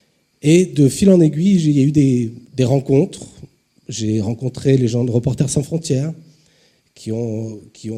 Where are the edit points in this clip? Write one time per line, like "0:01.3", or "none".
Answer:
0:02.4